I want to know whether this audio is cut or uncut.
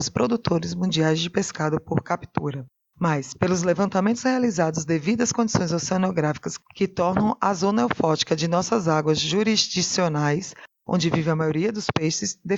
uncut